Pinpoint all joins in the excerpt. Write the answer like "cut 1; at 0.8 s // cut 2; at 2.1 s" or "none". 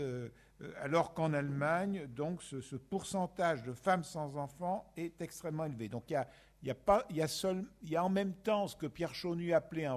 none

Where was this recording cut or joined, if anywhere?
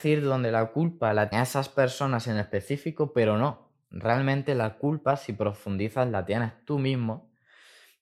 cut 1; at 1.3 s

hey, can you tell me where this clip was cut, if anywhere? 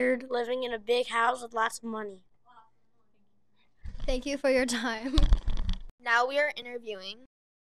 cut 1; at 2.3 s

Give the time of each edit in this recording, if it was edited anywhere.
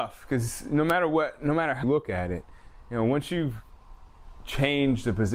cut 1; at 1.8 s

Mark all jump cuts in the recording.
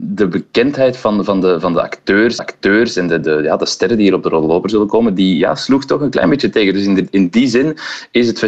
cut 1; at 2.4 s // cut 2; at 3.2 s

